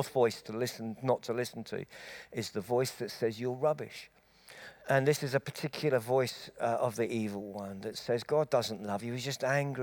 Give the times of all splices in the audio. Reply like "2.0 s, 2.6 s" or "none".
4.8 s